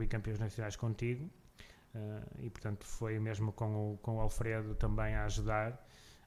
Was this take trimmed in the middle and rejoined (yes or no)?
no